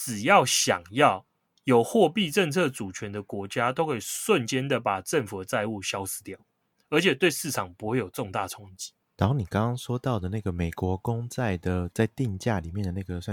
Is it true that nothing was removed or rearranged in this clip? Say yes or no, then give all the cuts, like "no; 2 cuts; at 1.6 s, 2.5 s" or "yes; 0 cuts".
yes; 0 cuts